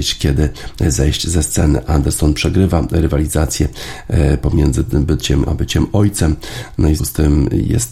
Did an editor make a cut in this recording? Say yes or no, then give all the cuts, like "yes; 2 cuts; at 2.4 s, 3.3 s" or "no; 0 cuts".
yes; 2 cuts; at 5.5 s, 7.0 s